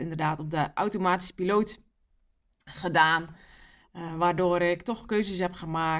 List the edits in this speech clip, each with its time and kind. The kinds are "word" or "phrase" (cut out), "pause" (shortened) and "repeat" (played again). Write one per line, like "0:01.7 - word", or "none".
none